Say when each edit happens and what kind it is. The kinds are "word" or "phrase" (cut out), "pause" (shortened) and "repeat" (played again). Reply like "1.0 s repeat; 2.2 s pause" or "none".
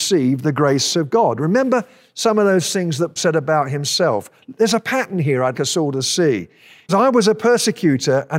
3.2 s word; 5.5 s word; 6.9 s word